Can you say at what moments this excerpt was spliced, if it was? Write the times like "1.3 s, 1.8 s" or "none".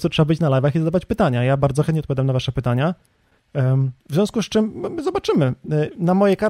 4.0 s